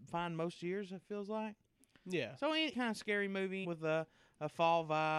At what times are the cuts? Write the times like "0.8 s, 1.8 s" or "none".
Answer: 2.7 s, 3.6 s